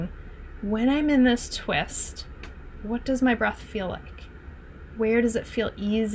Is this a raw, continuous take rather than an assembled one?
yes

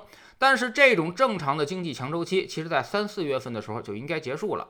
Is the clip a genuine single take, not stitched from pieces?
yes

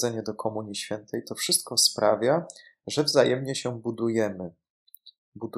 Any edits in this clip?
no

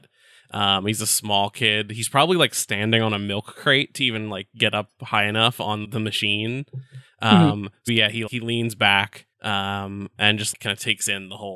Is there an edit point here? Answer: yes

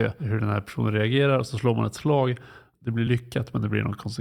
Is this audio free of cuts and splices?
yes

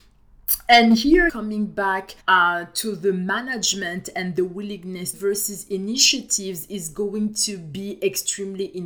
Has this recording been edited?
yes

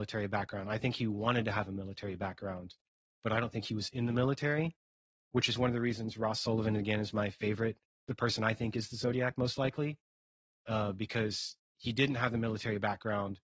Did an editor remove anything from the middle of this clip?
no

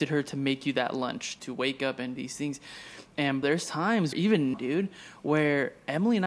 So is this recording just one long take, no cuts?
no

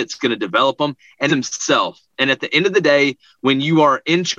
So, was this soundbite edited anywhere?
yes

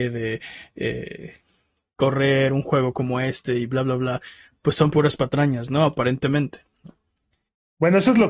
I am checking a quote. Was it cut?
no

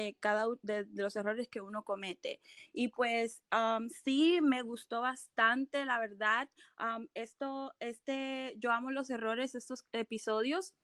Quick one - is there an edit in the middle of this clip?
no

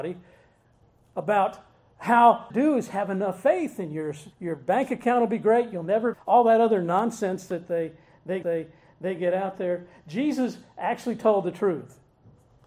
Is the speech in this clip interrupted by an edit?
yes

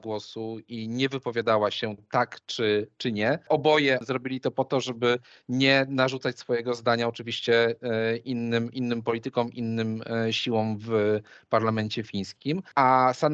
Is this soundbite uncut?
yes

